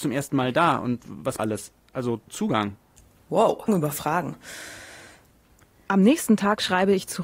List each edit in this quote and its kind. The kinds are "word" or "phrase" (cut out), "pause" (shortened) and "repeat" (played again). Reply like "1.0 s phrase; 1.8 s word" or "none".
1.4 s phrase; 2.3 s phrase; 3.7 s word